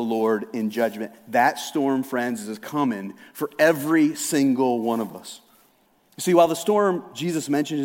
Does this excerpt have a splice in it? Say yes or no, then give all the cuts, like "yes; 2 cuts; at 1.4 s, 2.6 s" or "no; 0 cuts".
no; 0 cuts